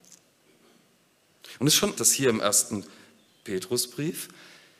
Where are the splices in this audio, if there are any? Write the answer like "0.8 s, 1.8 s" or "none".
1.9 s